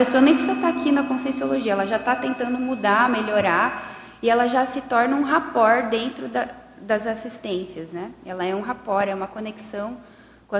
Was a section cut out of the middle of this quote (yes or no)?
no